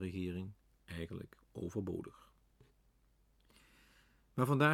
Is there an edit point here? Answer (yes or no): no